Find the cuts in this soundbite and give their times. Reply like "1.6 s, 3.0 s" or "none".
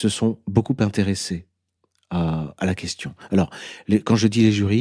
none